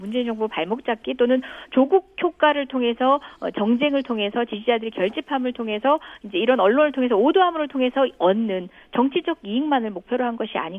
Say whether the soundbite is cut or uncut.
uncut